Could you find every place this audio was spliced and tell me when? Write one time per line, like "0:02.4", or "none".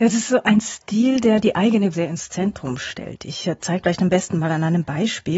0:01.9
0:03.8